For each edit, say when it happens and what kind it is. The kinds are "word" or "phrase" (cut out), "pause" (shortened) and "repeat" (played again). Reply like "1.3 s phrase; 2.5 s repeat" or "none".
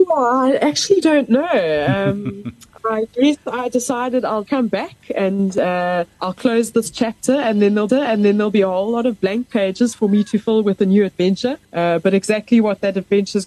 4.5 s word; 6.1 s pause; 7.9 s repeat; 11.6 s pause